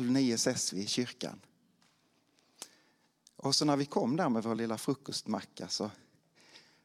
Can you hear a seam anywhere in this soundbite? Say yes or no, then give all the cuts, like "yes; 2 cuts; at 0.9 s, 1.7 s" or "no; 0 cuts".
no; 0 cuts